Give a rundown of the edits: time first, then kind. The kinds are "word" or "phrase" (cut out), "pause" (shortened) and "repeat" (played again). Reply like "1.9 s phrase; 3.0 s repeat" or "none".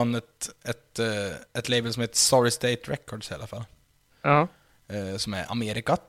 none